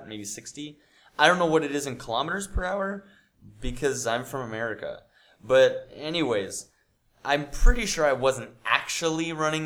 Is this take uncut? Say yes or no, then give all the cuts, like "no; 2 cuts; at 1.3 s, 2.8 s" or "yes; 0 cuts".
yes; 0 cuts